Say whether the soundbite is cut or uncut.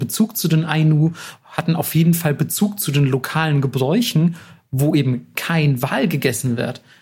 uncut